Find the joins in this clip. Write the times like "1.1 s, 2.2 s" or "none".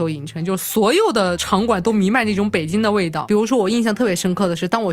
none